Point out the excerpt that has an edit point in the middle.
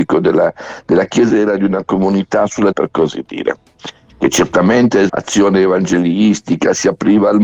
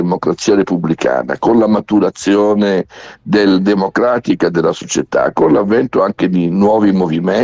first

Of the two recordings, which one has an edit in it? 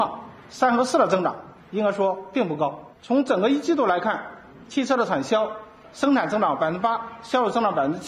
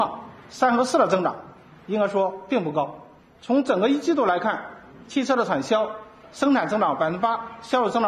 first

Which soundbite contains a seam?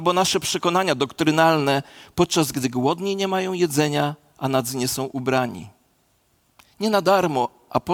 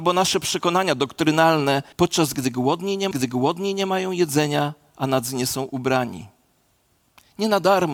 second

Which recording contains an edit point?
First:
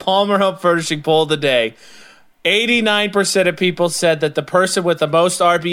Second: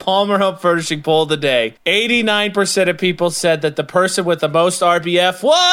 second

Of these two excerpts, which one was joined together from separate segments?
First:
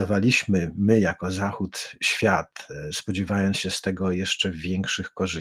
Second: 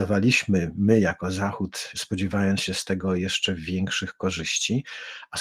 second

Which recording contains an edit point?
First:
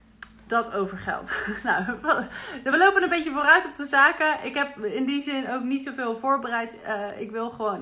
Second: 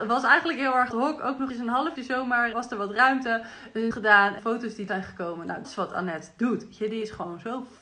second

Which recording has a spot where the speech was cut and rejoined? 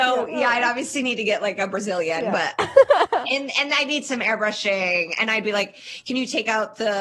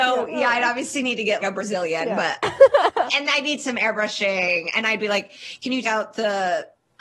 second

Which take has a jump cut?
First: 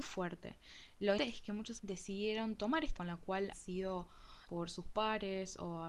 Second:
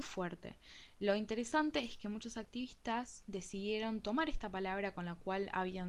first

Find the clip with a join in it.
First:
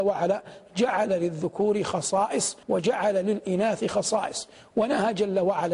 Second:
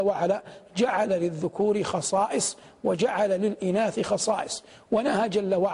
first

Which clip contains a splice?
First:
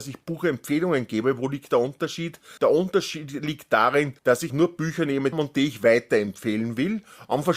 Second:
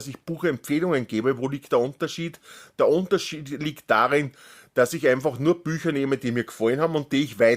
first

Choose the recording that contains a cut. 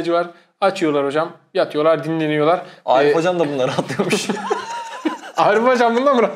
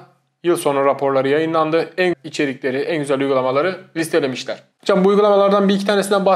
second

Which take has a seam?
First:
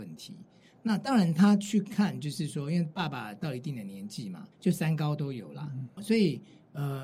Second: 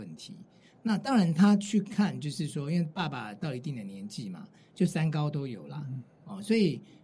first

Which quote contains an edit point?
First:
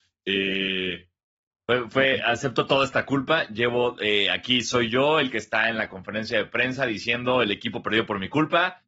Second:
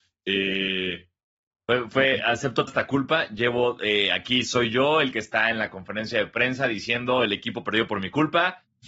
second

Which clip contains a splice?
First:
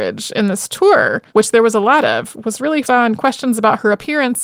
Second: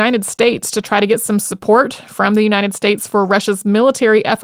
first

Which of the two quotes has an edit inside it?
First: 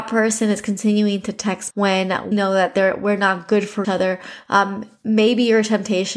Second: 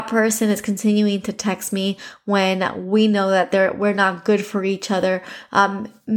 first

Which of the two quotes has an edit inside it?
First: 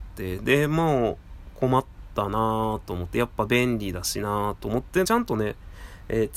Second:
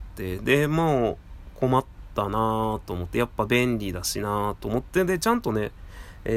first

